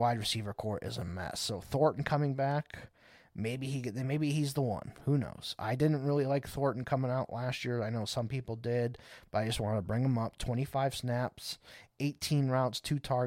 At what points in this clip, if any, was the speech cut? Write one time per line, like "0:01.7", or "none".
none